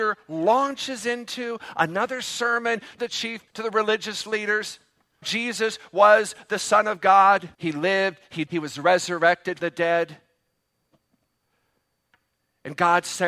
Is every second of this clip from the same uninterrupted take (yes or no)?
no